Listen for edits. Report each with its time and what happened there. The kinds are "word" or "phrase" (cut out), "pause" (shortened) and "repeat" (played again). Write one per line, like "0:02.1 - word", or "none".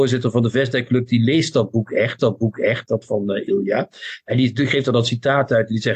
0:02.2 - repeat